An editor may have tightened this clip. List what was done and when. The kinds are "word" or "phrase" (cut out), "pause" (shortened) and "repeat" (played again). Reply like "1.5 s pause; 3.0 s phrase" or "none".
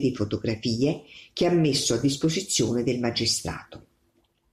none